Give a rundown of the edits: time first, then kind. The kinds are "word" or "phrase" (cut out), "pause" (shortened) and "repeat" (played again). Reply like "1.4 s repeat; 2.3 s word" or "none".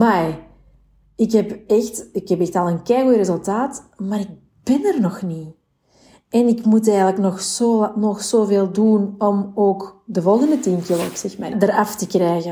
11.5 s word